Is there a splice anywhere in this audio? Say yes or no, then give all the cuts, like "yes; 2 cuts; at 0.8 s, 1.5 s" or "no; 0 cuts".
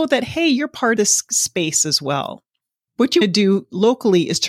yes; 2 cuts; at 1.0 s, 3.2 s